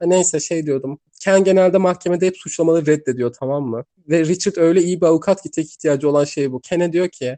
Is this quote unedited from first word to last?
yes; 0 cuts

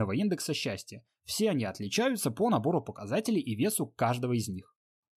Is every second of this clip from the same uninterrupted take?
yes; 0 cuts

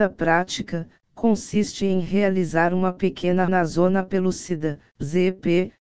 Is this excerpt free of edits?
no; 1 cut; at 3.5 s

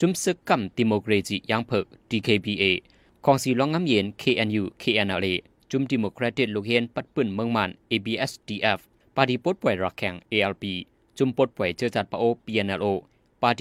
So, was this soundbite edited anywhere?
no; 0 cuts

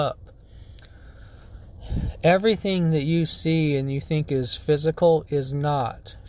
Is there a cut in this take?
no; 0 cuts

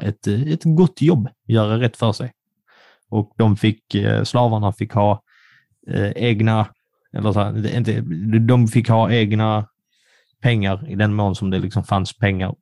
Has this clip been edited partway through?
no; 0 cuts

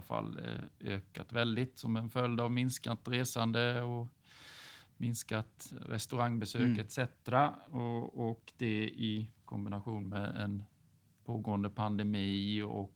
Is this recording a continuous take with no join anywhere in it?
no; 1 cut; at 5.7 s

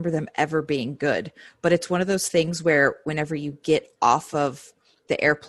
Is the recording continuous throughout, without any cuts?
yes; 0 cuts

